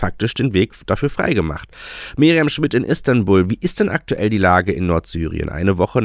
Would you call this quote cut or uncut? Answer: uncut